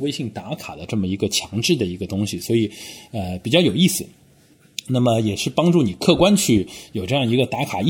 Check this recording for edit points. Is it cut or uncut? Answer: uncut